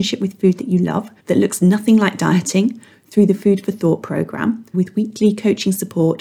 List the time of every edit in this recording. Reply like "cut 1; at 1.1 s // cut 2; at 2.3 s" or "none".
cut 1; at 1.2 s // cut 2; at 4.7 s